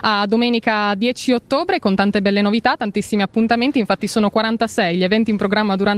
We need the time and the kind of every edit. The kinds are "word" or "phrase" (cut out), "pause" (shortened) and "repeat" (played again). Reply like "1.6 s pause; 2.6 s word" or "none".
none